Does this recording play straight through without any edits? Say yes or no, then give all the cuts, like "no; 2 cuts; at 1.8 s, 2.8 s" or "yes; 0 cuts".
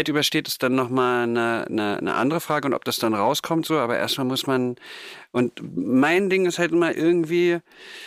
no; 1 cut; at 6.9 s